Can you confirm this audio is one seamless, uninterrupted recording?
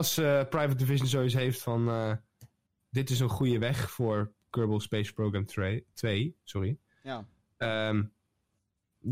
yes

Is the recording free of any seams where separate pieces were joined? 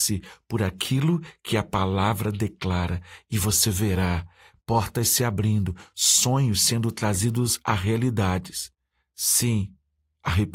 yes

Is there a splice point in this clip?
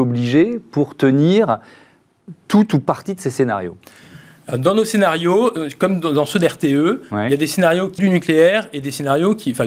yes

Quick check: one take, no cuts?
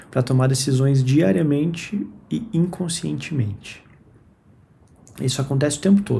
yes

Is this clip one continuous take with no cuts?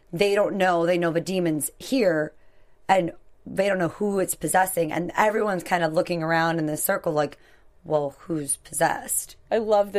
yes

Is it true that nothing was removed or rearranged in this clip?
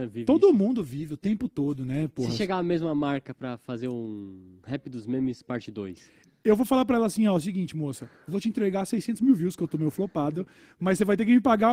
yes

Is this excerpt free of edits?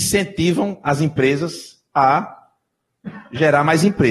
yes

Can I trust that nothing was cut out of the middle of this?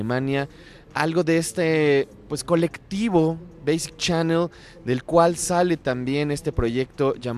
yes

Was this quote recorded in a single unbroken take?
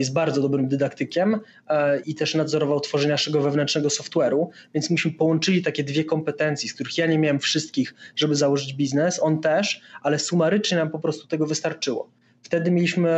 no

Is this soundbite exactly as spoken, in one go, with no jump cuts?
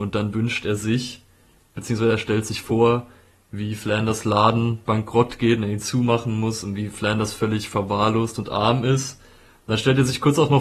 yes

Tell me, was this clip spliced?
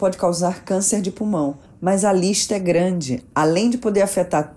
yes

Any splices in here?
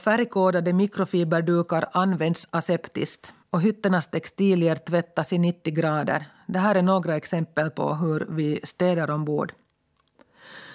yes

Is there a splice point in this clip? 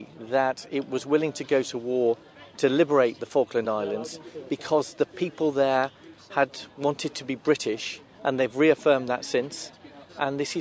no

